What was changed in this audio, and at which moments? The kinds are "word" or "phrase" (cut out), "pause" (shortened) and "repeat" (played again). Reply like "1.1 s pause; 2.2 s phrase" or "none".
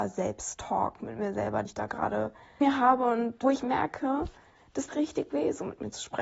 1.7 s word; 2.6 s word; 3.4 s word; 4.9 s word